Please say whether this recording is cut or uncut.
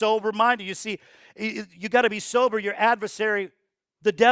uncut